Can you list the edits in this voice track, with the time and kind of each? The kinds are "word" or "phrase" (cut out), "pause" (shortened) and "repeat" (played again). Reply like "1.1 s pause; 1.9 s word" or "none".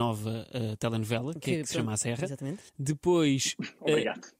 2.7 s pause